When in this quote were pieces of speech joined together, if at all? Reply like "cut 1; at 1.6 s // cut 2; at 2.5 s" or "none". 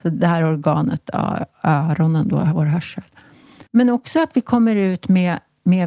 cut 1; at 1.5 s // cut 2; at 3.7 s